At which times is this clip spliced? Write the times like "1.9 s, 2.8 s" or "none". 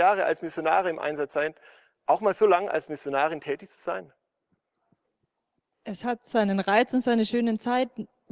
none